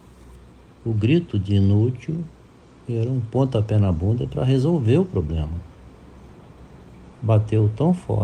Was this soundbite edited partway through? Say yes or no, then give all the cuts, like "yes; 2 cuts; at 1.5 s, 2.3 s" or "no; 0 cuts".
yes; 2 cuts; at 2.5 s, 7.1 s